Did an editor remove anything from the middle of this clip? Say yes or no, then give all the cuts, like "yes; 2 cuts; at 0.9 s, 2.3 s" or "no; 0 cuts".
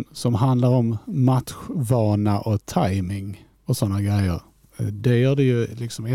no; 0 cuts